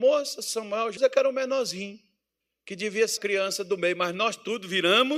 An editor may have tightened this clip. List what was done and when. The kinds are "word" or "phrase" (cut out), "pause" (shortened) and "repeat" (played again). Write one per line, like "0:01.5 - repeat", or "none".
0:01.0 - phrase
0:02.4 - pause
0:03.2 - word